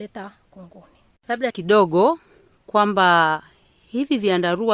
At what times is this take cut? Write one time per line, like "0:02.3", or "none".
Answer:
0:01.5